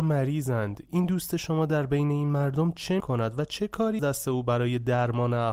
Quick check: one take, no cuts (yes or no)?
no